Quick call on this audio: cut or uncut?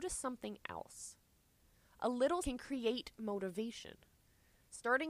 cut